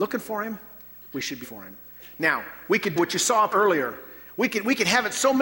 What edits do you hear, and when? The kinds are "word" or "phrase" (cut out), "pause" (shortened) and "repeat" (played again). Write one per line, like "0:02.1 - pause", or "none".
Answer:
0:01.4 - word
0:03.0 - word
0:03.5 - word